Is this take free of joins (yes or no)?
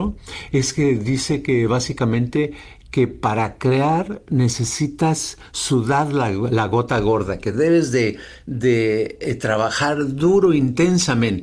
yes